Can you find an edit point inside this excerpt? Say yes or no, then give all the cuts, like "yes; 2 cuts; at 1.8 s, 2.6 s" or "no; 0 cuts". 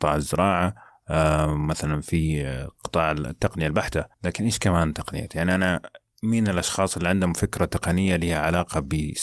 yes; 1 cut; at 4.1 s